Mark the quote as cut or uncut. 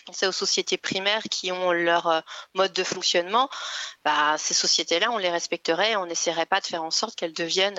uncut